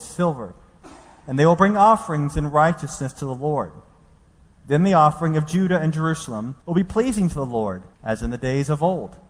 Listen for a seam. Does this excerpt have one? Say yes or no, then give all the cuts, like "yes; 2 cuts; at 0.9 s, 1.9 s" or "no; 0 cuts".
yes; 2 cuts; at 6.6 s, 7.9 s